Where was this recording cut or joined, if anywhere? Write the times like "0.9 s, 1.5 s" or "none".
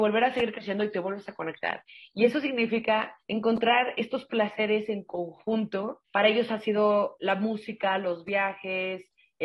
3.2 s, 6.0 s